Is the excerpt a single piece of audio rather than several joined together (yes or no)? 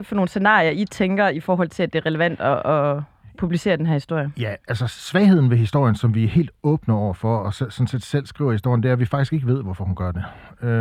yes